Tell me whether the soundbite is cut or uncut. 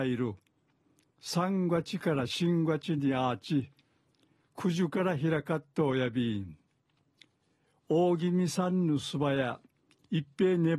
uncut